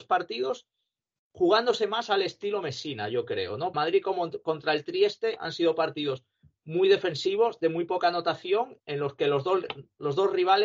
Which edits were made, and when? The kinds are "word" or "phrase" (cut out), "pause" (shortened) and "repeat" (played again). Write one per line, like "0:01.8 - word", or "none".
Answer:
0:03.7 - phrase
0:08.8 - word